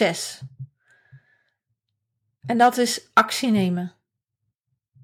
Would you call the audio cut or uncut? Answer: uncut